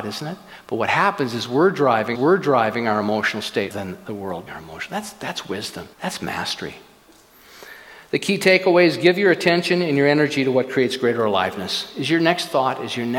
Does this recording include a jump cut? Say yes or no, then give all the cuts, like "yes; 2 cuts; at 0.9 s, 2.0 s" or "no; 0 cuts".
yes; 4 cuts; at 2.1 s, 3.7 s, 4.5 s, 5.9 s